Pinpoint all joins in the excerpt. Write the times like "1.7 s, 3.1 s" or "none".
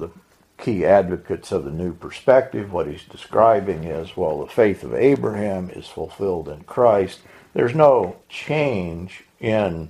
8.2 s